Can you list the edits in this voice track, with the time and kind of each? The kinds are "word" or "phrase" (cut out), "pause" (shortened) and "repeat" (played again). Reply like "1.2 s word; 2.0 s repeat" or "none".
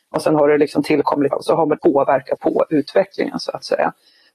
1.3 s word; 1.8 s word; 2.4 s word